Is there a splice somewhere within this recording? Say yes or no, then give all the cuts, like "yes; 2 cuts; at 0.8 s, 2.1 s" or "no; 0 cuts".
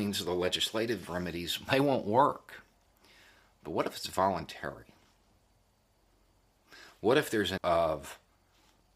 yes; 2 cuts; at 1.7 s, 7.6 s